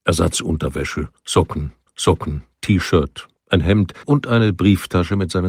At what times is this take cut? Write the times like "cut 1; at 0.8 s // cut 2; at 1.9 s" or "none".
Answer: cut 1; at 1.9 s // cut 2; at 4.0 s

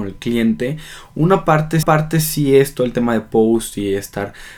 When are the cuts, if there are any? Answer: cut 1; at 1.8 s

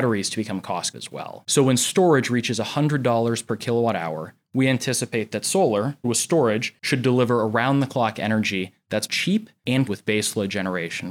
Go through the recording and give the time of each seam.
cut 1; at 0.9 s // cut 2; at 6.0 s // cut 3; at 9.1 s // cut 4; at 9.9 s

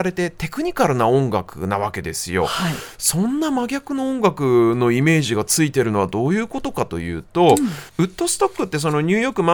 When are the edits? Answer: cut 1; at 7.9 s

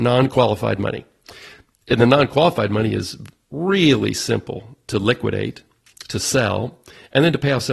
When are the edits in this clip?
none

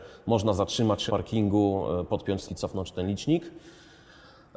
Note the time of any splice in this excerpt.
cut 1; at 1.1 s // cut 2; at 2.5 s

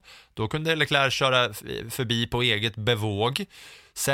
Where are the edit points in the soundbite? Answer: none

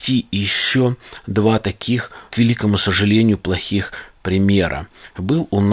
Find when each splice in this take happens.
none

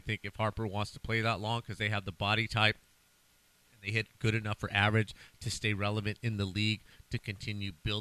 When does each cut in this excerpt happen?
none

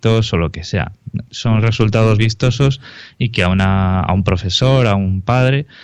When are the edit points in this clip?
cut 1; at 2.2 s

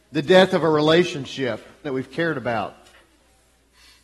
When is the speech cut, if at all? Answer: cut 1; at 1.8 s

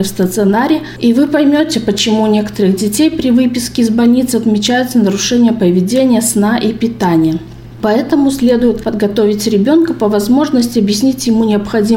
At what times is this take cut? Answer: none

